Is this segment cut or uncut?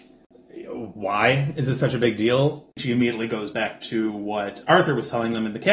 uncut